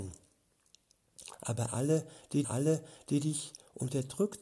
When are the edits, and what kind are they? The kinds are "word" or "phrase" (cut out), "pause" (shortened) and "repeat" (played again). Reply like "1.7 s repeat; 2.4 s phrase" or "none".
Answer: 2.4 s repeat